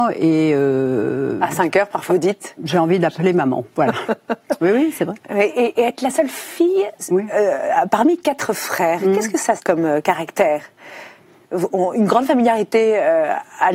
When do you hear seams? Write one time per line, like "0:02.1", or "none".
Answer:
0:02.1
0:02.6
0:09.6